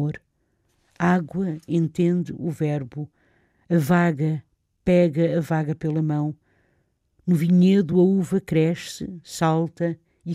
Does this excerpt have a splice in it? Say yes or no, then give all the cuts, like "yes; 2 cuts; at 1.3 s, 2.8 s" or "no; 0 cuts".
no; 0 cuts